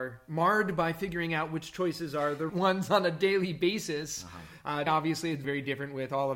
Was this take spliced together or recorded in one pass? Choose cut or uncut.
cut